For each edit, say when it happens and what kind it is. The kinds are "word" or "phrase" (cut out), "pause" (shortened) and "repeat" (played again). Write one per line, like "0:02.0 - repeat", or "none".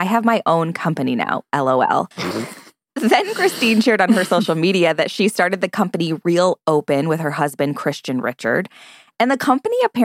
0:02.1 - pause

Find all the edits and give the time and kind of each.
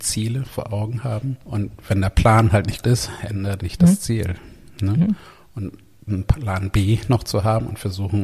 0:01.4 - pause
0:02.8 - word
0:03.6 - phrase
0:06.1 - word

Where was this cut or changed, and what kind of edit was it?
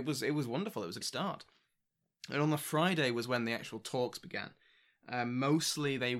0:01.0 - word

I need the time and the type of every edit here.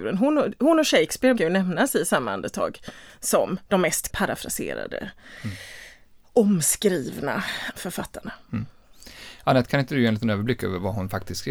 0:01.4 - word
0:04.1 - word
0:07.7 - word

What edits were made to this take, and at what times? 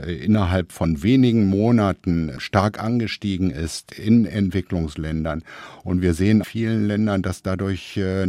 0:06.4 - phrase

